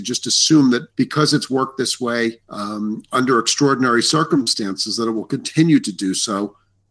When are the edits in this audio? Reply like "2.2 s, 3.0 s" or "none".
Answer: 0.9 s, 2.4 s